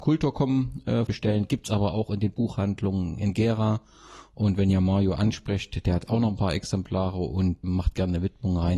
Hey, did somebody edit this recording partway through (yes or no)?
yes